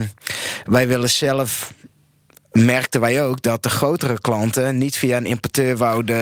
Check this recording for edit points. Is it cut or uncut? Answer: uncut